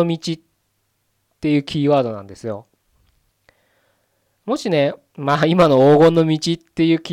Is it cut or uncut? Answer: uncut